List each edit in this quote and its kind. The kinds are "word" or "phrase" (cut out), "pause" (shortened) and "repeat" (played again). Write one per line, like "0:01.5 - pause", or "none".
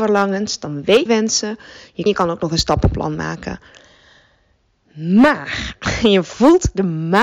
0:01.1 - phrase
0:02.1 - phrase